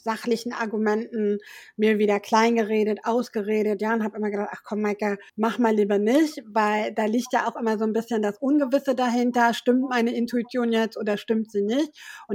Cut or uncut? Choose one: cut